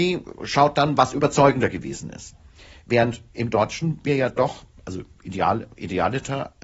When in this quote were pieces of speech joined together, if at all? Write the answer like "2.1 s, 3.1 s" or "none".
none